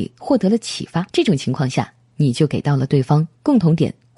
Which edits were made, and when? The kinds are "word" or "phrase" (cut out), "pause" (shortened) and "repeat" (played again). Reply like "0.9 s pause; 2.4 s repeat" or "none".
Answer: 1.1 s pause